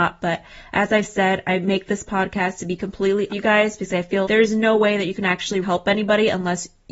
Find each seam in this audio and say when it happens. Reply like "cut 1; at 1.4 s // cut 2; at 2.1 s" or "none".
cut 1; at 3.3 s // cut 2; at 4.2 s // cut 3; at 5.6 s